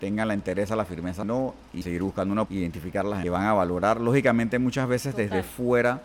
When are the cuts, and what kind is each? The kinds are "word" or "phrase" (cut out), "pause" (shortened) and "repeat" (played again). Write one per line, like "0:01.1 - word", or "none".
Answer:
0:01.2 - phrase
0:01.8 - word
0:02.5 - word
0:03.2 - phrase